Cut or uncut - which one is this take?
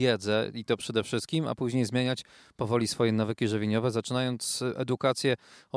uncut